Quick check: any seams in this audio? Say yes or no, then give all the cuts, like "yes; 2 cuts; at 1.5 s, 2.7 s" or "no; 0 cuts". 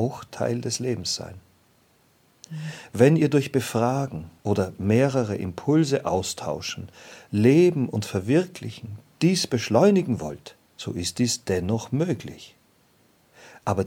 yes; 2 cuts; at 4.4 s, 10.7 s